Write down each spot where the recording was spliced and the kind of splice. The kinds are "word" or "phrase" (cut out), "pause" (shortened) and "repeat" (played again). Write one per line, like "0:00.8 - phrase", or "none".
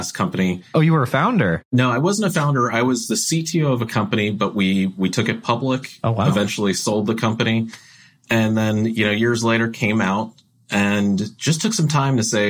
none